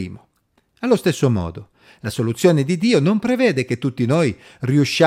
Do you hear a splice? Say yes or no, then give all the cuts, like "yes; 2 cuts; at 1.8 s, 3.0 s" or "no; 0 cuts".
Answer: no; 0 cuts